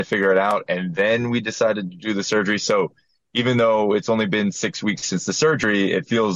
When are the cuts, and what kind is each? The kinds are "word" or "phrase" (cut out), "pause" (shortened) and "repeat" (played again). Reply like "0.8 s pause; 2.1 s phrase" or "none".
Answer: none